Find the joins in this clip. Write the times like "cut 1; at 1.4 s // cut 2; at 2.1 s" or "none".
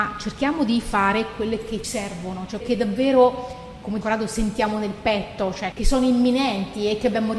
cut 1; at 1.8 s // cut 2; at 2.6 s // cut 3; at 4.0 s // cut 4; at 5.7 s